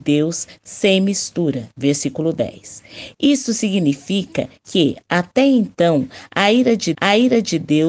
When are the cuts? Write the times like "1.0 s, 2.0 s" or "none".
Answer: 4.6 s, 6.9 s